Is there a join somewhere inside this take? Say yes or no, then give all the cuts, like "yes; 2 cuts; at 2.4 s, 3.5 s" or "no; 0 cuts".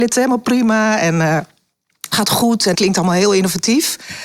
yes; 2 cuts; at 2.1 s, 2.7 s